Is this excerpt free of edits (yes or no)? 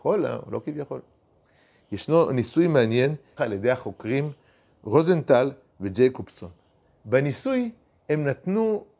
no